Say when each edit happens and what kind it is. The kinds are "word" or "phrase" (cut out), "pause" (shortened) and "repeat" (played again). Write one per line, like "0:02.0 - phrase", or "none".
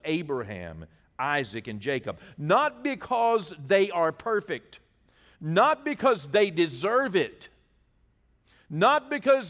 none